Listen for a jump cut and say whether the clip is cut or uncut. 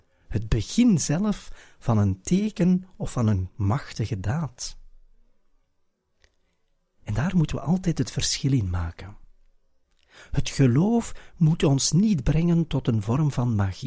uncut